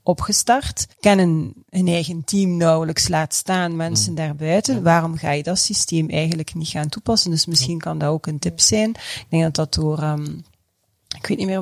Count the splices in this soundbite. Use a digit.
1